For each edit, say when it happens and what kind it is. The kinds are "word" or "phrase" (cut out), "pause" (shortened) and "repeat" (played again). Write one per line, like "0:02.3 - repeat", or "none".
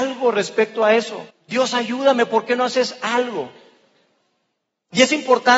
0:01.3 - pause